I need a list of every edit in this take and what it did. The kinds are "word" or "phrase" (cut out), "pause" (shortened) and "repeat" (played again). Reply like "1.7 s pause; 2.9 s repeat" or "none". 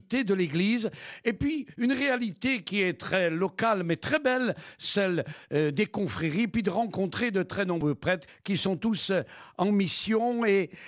none

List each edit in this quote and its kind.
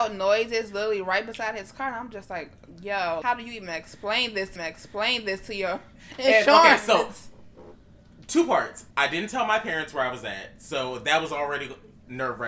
3.2 s word; 4.6 s repeat; 8.9 s pause

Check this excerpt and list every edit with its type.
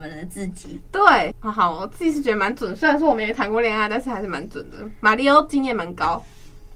none

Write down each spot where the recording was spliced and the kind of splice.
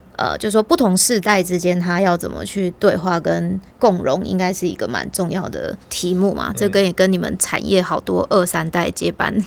3.7 s pause; 5.8 s pause

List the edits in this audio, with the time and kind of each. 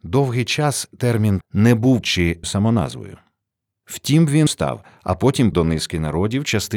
1.4 s word; 2.0 s word; 2.4 s word; 4.5 s word; 5.5 s word

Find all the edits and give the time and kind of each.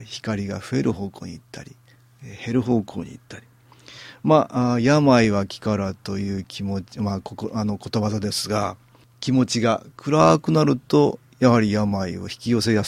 none

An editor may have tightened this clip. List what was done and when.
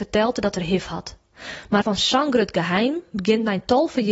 1.8 s phrase

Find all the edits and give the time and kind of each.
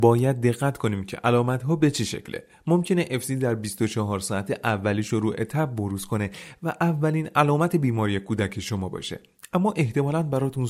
none

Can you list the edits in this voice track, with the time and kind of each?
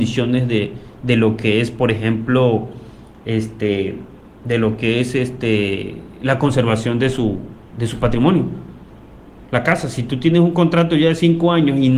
none

